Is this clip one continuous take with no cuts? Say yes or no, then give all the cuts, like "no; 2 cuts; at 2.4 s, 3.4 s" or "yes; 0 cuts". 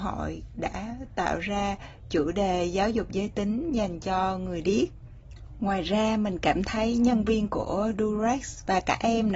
yes; 0 cuts